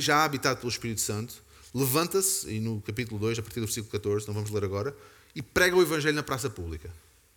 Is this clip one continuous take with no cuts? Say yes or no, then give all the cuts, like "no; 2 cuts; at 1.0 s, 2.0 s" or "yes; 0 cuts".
yes; 0 cuts